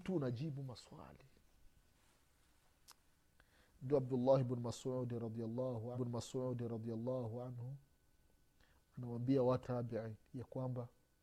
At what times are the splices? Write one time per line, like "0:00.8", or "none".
0:05.9
0:09.6
0:10.2